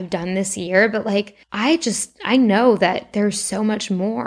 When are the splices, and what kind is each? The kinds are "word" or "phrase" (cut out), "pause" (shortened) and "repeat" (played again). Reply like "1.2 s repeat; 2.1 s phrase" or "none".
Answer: 1.4 s pause